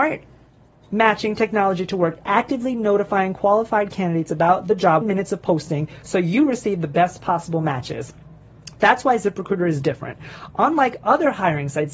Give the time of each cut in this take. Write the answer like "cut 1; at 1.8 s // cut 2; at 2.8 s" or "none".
cut 1; at 5.0 s